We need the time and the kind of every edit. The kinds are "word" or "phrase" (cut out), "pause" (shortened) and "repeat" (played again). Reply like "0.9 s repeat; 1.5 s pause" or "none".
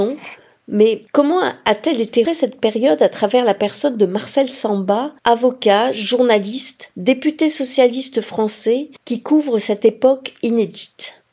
2.3 s phrase; 5.2 s pause